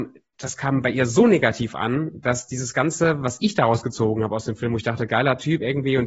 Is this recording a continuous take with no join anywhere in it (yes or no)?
yes